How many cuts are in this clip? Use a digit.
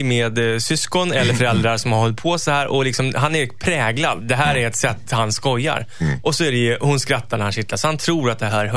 0